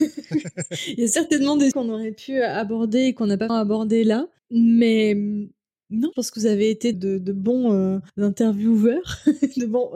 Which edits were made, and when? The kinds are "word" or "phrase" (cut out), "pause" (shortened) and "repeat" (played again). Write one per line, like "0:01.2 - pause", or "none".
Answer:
0:01.7 - word
0:03.5 - word
0:04.4 - pause
0:06.1 - word
0:06.9 - word
0:08.1 - pause

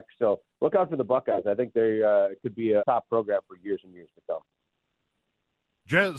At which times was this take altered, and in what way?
0:02.8 - word

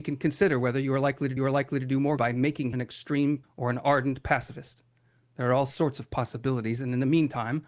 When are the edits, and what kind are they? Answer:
0:01.4 - repeat
0:02.2 - word
0:02.7 - word
0:03.4 - word

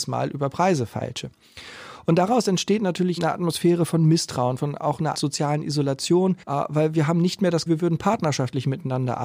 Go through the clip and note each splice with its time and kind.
0:03.2 - word
0:05.1 - word
0:06.4 - pause
0:07.7 - word

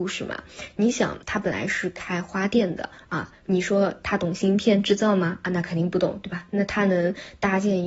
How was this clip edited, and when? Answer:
0:01.2 - pause

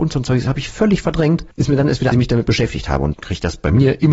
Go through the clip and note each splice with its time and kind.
0:01.5 - pause
0:02.1 - phrase
0:03.1 - phrase

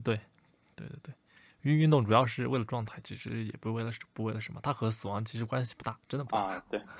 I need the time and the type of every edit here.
0:06.0 - pause

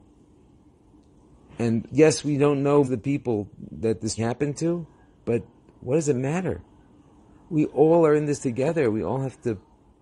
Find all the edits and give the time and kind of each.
0:02.8 - word
0:04.2 - word

